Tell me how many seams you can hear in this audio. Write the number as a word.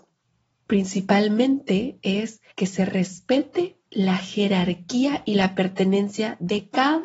one